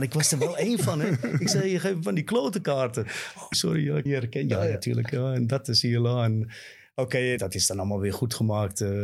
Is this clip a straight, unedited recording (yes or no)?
no